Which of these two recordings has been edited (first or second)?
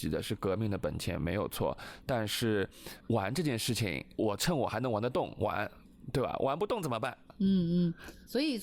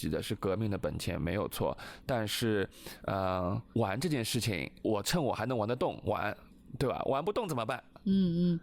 first